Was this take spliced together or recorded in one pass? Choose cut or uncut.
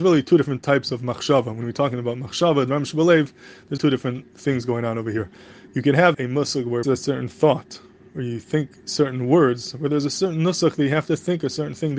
cut